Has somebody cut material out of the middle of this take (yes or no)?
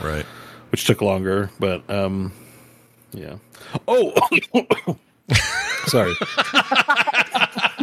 no